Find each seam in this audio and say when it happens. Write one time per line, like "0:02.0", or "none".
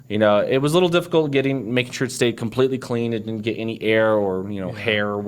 none